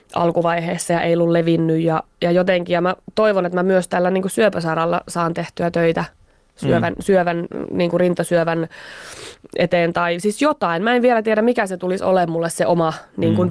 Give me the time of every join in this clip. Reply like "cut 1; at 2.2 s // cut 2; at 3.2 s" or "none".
none